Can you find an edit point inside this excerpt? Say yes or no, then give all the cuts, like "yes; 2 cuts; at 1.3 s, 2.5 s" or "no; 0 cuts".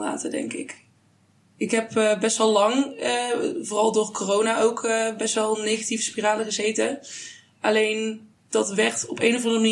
yes; 1 cut; at 8.4 s